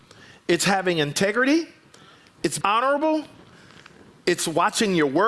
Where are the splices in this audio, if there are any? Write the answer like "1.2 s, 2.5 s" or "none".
2.6 s

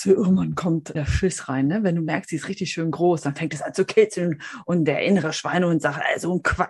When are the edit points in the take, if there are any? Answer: 0.9 s

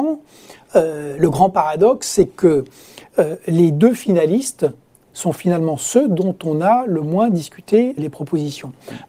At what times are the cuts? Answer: 8.0 s

